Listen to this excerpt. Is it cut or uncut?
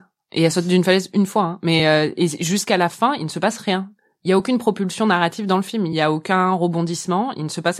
uncut